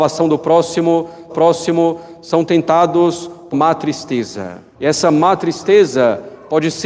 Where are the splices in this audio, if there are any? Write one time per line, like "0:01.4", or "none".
0:01.3
0:03.5
0:04.7